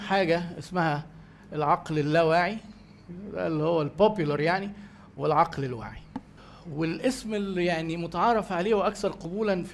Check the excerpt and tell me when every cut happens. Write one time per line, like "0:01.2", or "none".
none